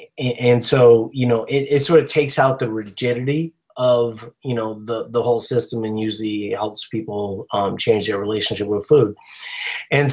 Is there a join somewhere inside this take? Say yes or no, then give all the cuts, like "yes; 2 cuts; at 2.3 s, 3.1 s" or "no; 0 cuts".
no; 0 cuts